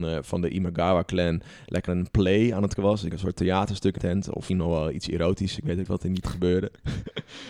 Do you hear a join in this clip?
yes; 7 cuts; at 1.9 s, 2.8 s, 3.1 s, 4.0 s, 4.5 s, 5.9 s, 6.2 s

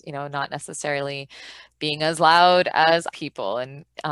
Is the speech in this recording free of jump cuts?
no; 1 cut; at 3.1 s

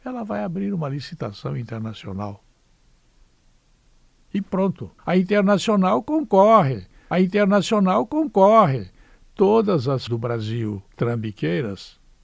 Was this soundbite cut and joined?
yes; 4 cuts; at 5.0 s, 7.1 s, 10.1 s, 10.9 s

